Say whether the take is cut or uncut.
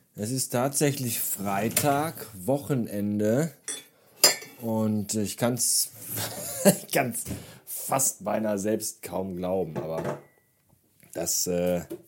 uncut